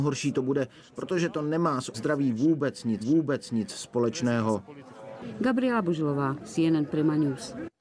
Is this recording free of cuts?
no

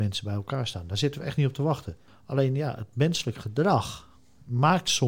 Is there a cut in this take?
no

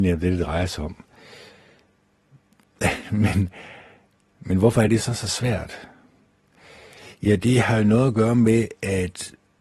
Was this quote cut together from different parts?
no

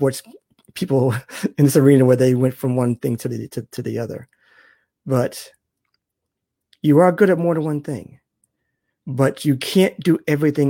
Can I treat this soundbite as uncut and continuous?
yes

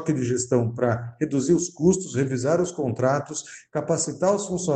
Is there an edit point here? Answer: no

